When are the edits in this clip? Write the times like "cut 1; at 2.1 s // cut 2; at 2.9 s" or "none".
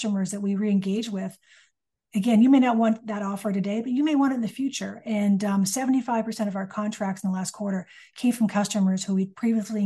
none